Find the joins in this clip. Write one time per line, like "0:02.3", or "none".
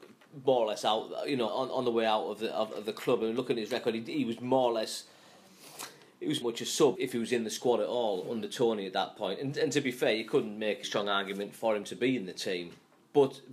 0:01.5
0:06.4
0:06.9
0:10.8